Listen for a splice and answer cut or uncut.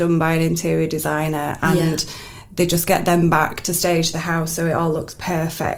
uncut